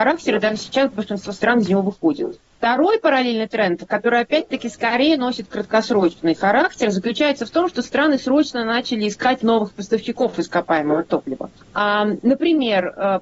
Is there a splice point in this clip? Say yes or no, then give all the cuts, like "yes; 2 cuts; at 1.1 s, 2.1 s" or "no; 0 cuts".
yes; 2 cuts; at 2.5 s, 11.6 s